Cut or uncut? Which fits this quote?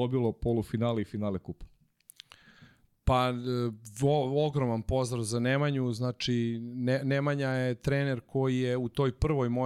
uncut